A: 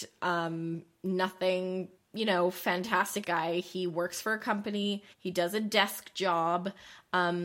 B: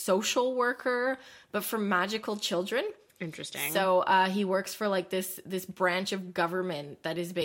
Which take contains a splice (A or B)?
A